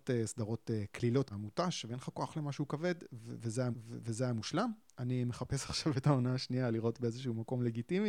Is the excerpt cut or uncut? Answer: cut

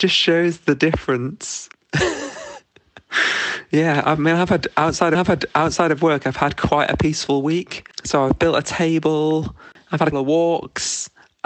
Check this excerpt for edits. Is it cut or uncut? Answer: cut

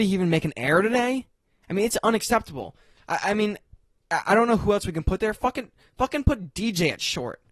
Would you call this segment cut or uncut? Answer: uncut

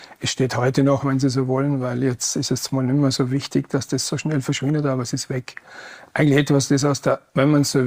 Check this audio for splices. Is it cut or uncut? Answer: uncut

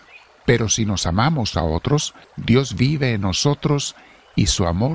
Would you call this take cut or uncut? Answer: cut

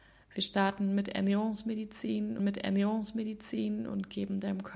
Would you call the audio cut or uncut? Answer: cut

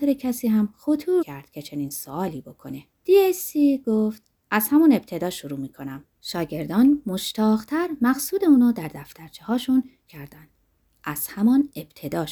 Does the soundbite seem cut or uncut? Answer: cut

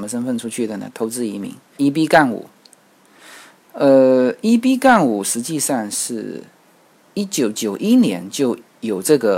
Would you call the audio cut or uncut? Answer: cut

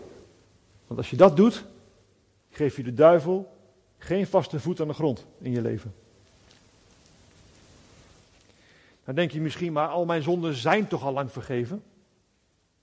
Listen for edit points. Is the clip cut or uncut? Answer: uncut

